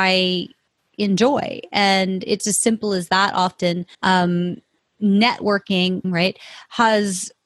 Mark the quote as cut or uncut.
cut